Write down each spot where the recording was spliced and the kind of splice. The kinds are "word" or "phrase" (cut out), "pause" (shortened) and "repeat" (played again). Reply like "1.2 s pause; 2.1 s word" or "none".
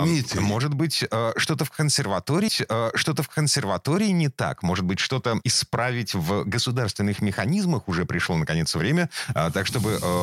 2.5 s repeat